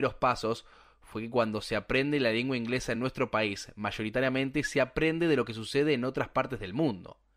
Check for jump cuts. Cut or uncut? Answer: uncut